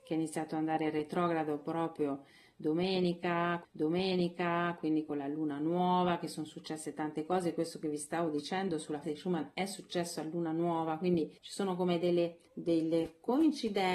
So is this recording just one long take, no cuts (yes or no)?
no